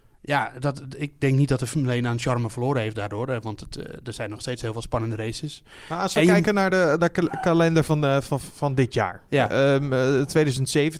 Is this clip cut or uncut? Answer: uncut